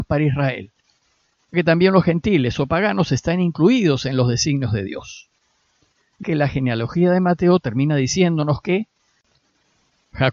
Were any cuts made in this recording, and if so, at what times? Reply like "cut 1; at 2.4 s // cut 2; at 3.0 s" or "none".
cut 1; at 1.5 s // cut 2; at 6.2 s

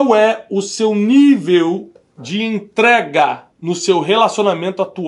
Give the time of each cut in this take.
cut 1; at 3.5 s

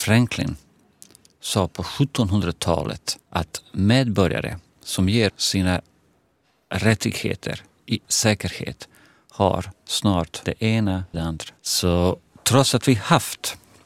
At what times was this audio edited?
cut 1; at 3.2 s // cut 2; at 5.3 s // cut 3; at 8.0 s // cut 4; at 10.5 s // cut 5; at 11.1 s // cut 6; at 11.6 s

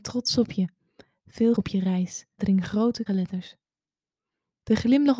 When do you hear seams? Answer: cut 1; at 1.6 s // cut 2; at 2.4 s // cut 3; at 3.1 s

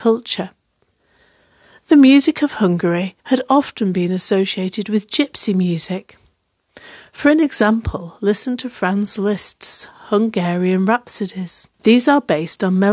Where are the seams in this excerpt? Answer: cut 1; at 3.2 s // cut 2; at 11.7 s

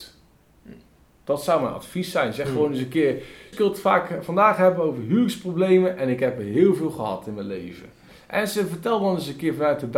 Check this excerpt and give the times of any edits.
cut 1; at 3.5 s

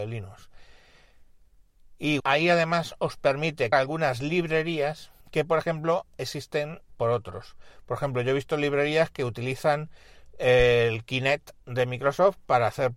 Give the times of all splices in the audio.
cut 1; at 2.2 s // cut 2; at 3.7 s // cut 3; at 5.2 s // cut 4; at 6.9 s

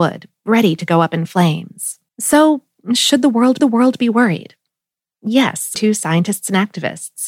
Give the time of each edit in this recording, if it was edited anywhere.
cut 1; at 2.1 s // cut 2; at 3.6 s // cut 3; at 5.8 s

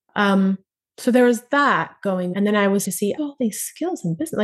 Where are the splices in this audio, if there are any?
cut 1; at 2.3 s // cut 2; at 2.8 s // cut 3; at 3.2 s

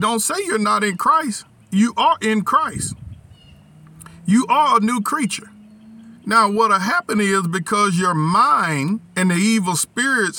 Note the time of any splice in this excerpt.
cut 1; at 1.5 s // cut 2; at 6.2 s // cut 3; at 9.1 s

